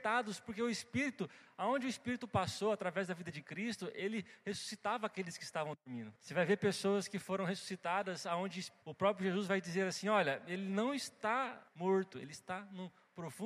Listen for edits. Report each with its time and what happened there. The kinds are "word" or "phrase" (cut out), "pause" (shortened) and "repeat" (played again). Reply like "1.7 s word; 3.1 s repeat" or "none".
6.2 s pause; 8.8 s pause; 11.7 s pause

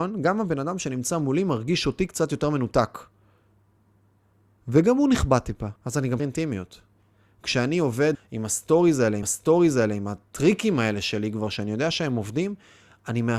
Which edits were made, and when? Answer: 5.8 s pause; 6.2 s word; 8.1 s word; 9.2 s repeat

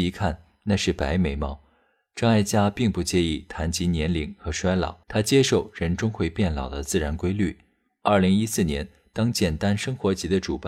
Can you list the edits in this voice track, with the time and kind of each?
5.0 s pause

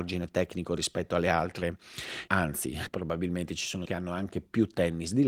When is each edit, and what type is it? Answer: 2.3 s word; 2.9 s word; 3.9 s word

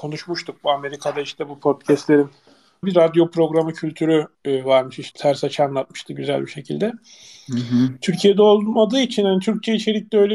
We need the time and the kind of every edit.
2.8 s phrase; 4.3 s pause; 5.1 s word

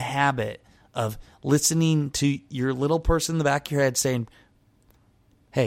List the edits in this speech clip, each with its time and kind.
none

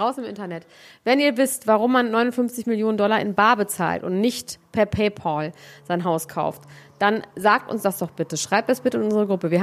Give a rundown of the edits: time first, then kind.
none

